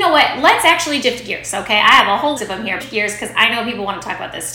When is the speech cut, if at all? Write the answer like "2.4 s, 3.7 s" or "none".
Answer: 1.0 s, 2.4 s, 2.8 s